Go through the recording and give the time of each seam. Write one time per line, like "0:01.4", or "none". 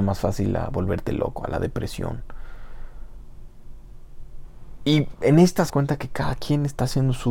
0:05.7